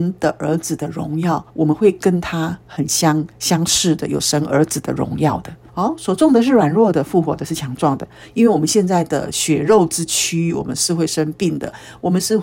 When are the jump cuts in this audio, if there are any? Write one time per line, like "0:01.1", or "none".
0:01.5
0:03.3
0:05.7